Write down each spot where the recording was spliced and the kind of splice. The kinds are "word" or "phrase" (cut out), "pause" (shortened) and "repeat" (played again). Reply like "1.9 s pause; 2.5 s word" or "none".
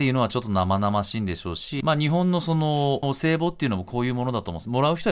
1.8 s phrase; 3.0 s phrase